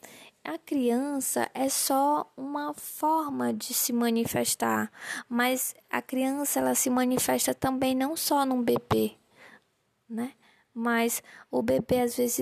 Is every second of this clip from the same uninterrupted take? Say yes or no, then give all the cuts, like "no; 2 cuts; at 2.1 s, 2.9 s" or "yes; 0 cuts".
yes; 0 cuts